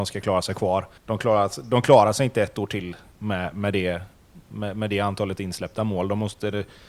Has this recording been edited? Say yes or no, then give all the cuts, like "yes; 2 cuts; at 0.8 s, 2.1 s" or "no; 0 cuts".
yes; 1 cut; at 1.0 s